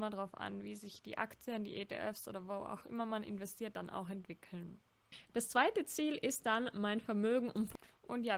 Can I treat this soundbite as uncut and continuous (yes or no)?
yes